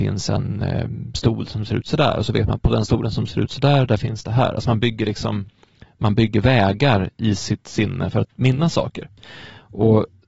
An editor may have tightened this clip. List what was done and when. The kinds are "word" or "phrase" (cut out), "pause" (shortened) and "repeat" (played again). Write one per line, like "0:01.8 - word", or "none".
none